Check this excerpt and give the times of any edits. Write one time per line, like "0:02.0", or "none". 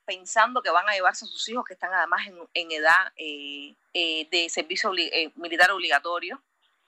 0:03.9